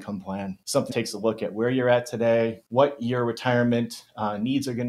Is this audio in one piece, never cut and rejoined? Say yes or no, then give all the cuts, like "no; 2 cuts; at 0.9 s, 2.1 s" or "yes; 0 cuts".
no; 1 cut; at 0.9 s